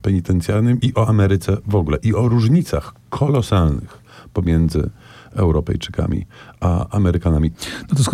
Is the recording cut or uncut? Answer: uncut